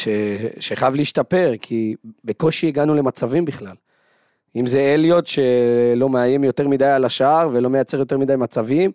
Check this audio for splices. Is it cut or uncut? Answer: uncut